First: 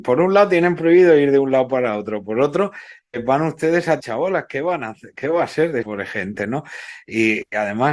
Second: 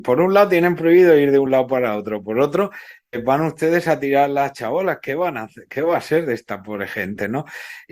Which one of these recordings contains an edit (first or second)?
first